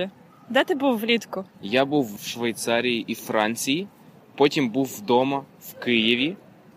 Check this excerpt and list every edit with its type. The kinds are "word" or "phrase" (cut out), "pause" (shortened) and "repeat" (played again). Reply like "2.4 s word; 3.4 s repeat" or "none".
1.5 s pause; 2.2 s word